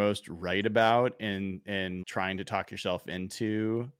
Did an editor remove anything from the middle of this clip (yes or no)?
yes